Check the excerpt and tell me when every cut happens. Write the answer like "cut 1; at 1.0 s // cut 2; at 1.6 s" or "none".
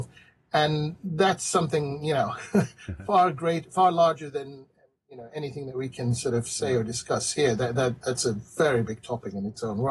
none